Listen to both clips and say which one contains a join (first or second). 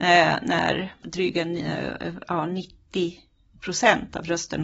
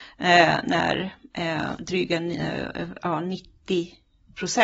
first